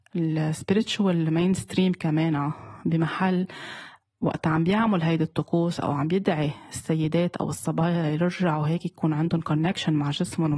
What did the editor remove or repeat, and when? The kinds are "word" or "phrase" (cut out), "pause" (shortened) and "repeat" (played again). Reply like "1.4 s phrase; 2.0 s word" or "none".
none